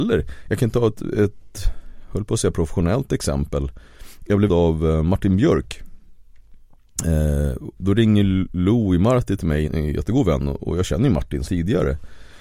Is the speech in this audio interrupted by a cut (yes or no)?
yes